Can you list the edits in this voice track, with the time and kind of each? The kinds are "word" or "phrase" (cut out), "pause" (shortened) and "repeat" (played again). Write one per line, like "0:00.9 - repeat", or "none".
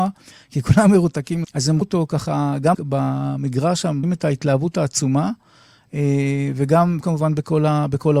0:01.4 - word
0:01.8 - word
0:02.7 - word
0:04.0 - word
0:07.0 - word